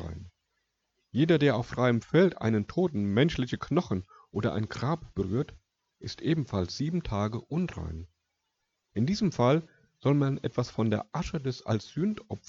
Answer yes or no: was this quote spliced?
no